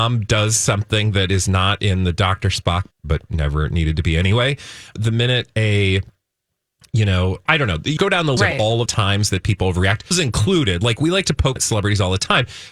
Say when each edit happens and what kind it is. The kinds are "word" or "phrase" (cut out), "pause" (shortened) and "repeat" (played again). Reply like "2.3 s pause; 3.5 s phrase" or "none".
2.9 s word; 3.3 s word; 5.0 s word; 7.5 s word; 8.0 s word; 8.4 s word; 8.9 s word; 10.1 s word; 11.6 s word

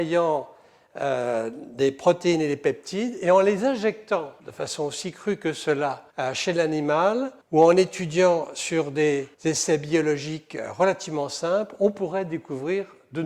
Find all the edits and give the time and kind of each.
4.4 s pause; 6.1 s pause; 7.4 s pause; 9.3 s pause

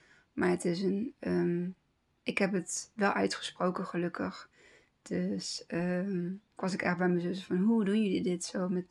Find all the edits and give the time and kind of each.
none

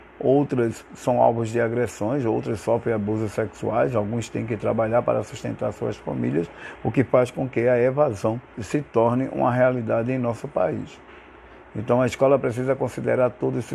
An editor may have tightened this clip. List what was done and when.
8.5 s word

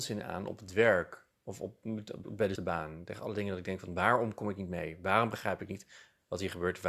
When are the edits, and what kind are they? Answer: 2.2 s word; 2.6 s word

